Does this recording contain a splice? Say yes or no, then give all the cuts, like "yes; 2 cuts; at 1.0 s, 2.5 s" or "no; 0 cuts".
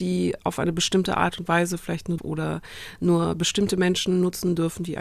yes; 1 cut; at 2.2 s